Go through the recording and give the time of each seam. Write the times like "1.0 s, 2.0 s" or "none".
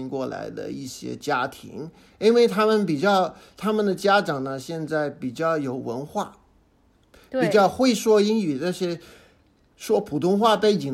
none

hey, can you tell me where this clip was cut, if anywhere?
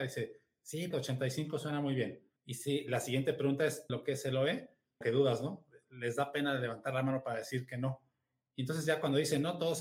0.9 s, 2.4 s, 3.9 s, 5.0 s

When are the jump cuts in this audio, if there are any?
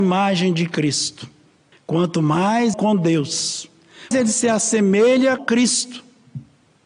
1.7 s, 2.7 s, 4.1 s, 5.4 s

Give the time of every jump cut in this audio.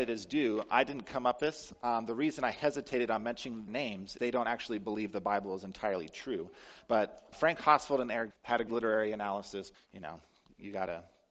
1.4 s, 3.7 s, 4.2 s, 7.3 s, 8.3 s, 8.7 s, 9.7 s

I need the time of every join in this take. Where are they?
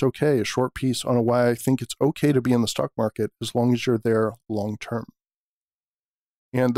none

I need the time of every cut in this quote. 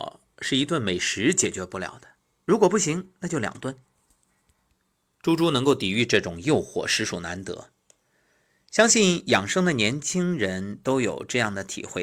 none

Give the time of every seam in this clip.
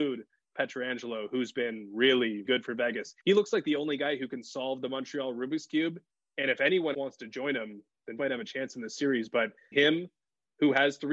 2.4 s, 3.2 s, 6.1 s, 6.9 s, 8.2 s, 9.7 s

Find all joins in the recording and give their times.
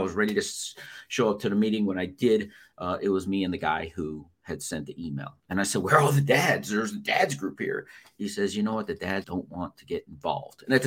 5.4 s, 9.2 s

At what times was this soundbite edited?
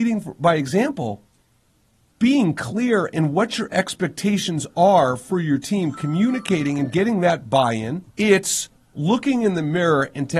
8.1 s

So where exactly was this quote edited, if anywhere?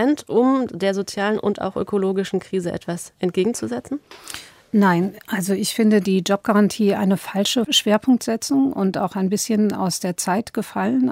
none

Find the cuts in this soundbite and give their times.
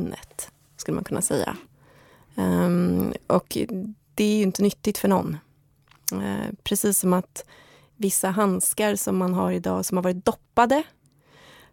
none

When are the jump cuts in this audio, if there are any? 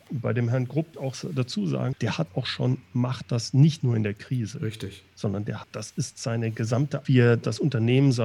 0.9 s, 1.9 s, 2.3 s, 3.8 s, 5.6 s, 7.0 s

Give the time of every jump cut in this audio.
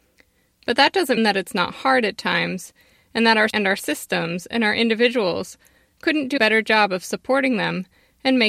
1.2 s, 3.5 s, 6.4 s

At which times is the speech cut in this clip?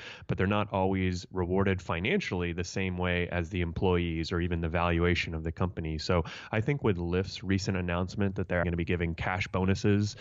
8.6 s

